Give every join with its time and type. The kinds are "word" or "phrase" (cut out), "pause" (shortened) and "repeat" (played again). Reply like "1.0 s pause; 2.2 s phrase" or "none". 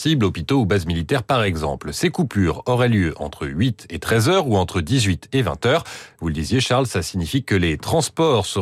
none